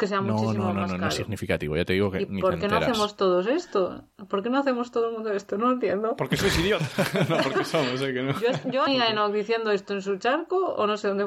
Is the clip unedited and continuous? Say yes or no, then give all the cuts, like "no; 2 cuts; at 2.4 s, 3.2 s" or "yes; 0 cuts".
no; 1 cut; at 8.9 s